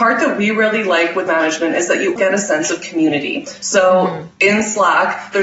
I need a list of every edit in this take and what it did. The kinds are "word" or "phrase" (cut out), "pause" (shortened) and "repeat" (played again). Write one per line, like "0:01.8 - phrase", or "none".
0:01.3 - word
0:02.2 - word